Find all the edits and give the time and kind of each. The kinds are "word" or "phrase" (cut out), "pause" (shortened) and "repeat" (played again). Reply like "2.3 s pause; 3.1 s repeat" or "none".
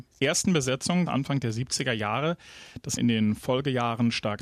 1.1 s phrase; 3.0 s phrase